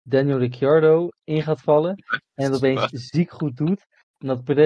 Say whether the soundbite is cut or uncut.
uncut